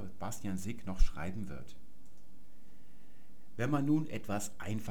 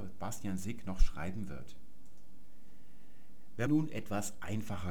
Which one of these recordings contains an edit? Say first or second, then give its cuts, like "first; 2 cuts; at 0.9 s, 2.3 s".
second; 1 cut; at 3.7 s